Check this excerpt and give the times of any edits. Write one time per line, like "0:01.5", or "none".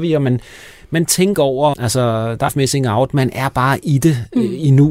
0:01.3
0:01.7
0:02.5